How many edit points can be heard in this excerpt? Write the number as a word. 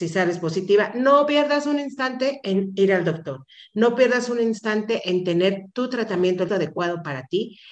one